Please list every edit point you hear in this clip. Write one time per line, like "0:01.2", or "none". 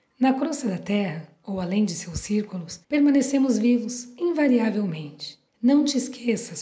0:02.8
0:05.5

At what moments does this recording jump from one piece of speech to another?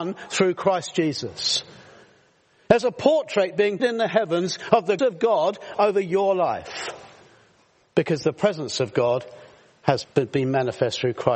0:03.8
0:05.0
0:10.0

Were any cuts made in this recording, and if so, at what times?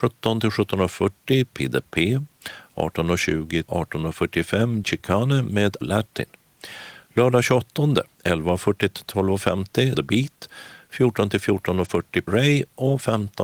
0:03.7
0:04.8
0:05.8
0:08.1
0:09.9
0:12.3

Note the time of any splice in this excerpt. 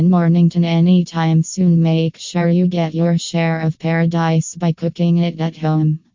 none

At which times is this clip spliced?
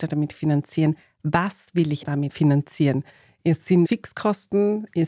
0:02.0
0:03.8

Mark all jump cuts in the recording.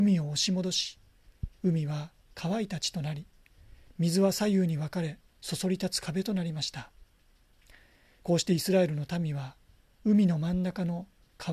0:05.3

